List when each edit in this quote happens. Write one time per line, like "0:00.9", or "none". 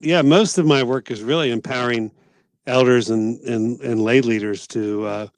none